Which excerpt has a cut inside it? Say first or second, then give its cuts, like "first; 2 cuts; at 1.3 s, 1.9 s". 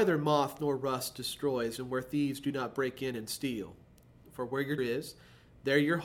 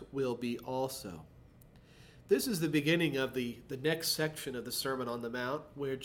first; 1 cut; at 4.8 s